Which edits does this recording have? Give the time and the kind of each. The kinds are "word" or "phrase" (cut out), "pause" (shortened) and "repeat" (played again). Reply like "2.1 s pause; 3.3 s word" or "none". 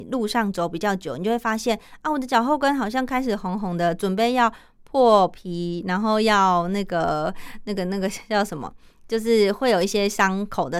none